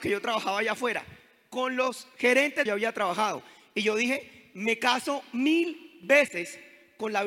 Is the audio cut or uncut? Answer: cut